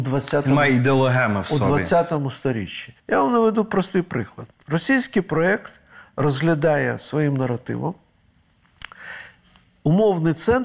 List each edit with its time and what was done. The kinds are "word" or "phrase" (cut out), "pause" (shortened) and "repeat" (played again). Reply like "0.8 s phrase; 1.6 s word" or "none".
3.0 s pause